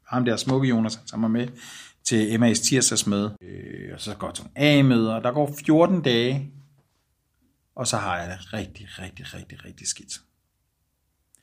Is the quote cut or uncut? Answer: uncut